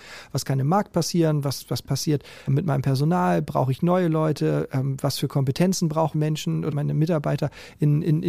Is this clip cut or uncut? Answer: cut